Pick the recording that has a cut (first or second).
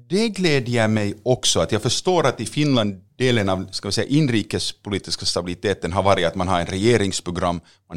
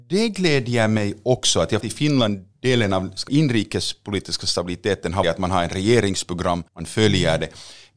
second